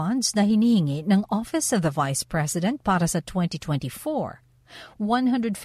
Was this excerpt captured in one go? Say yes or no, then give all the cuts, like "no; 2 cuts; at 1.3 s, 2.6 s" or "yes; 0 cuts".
yes; 0 cuts